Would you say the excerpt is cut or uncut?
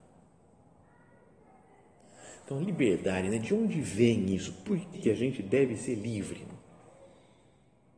cut